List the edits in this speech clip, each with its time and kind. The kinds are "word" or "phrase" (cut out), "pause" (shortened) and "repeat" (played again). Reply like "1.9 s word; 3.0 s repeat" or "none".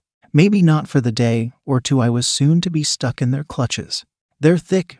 none